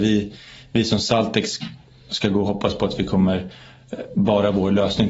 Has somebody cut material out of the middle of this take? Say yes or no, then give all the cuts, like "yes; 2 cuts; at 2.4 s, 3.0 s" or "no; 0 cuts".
no; 0 cuts